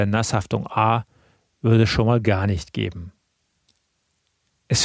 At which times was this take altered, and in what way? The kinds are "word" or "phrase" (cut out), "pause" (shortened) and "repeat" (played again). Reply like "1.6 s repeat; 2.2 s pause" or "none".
none